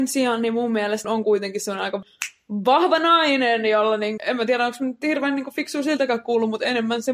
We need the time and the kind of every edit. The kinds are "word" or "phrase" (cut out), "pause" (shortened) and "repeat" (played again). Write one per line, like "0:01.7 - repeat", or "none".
0:04.2 - word